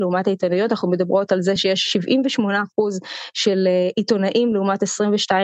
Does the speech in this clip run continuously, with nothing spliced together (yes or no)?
yes